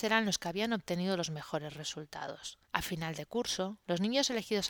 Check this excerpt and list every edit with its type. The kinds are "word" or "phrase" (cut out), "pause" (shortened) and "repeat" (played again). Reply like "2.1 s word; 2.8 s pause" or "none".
2.6 s pause

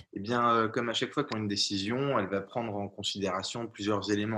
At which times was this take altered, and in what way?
1.3 s phrase

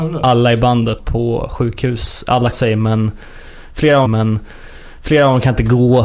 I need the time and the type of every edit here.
1.0 s word; 2.5 s word; 4.0 s repeat

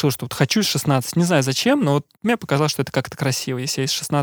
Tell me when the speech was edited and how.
2.1 s pause

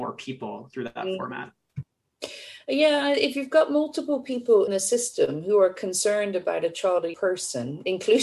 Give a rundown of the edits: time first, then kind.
4.7 s word; 7.1 s word

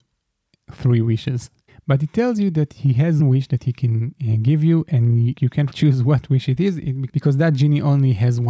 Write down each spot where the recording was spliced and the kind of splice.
1.7 s pause; 3.2 s word; 5.3 s word; 5.7 s word

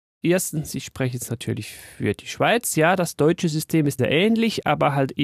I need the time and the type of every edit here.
4.0 s word

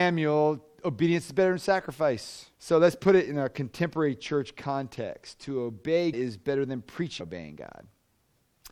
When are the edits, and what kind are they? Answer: 2.5 s pause; 6.1 s word; 7.2 s word

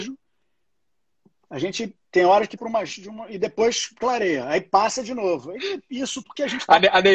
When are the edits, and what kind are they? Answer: 2.6 s word; 2.9 s word; 6.2 s word

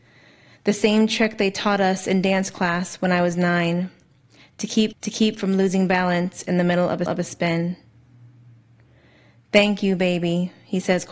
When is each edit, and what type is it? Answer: 4.9 s repeat; 7.1 s repeat

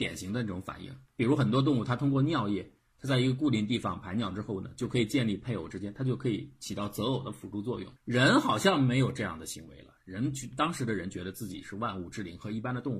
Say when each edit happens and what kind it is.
1.1 s pause; 8.0 s pause

